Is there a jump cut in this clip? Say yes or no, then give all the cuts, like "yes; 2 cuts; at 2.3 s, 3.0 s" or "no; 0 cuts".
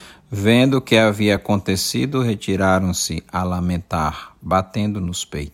no; 0 cuts